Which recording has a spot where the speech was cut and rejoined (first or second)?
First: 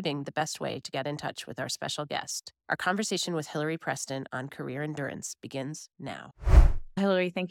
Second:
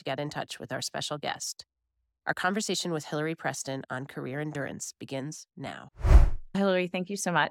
first